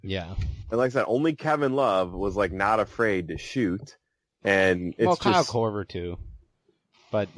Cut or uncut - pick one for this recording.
uncut